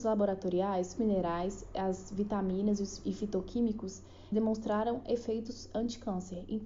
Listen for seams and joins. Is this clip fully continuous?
no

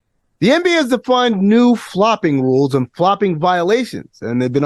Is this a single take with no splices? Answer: yes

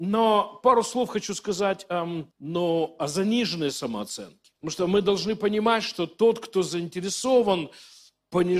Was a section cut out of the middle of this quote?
yes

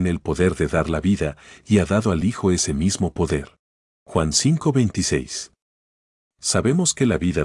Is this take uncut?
yes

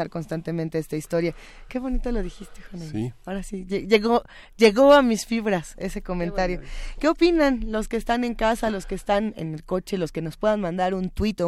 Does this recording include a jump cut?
no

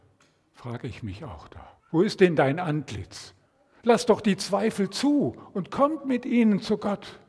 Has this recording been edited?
yes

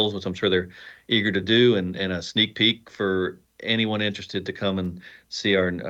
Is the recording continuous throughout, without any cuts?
yes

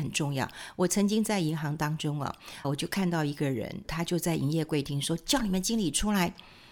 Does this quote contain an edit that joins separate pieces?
yes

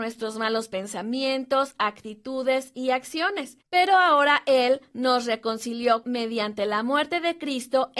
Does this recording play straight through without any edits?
no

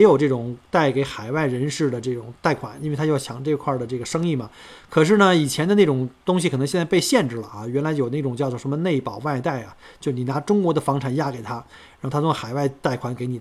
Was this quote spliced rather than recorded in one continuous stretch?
no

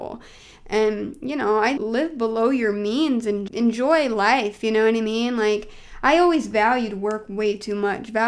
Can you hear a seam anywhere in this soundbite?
yes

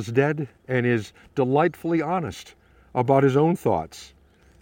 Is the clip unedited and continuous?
yes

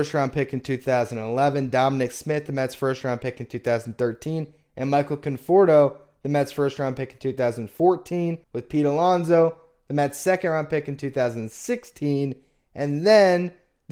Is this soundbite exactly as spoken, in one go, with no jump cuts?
no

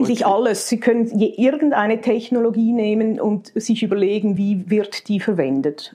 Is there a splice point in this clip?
no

